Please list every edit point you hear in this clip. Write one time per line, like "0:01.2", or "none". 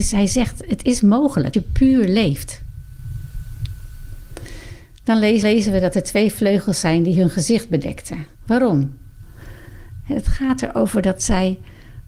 0:01.5
0:05.4
0:08.3